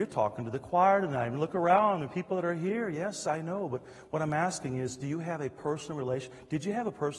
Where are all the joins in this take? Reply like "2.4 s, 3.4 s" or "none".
none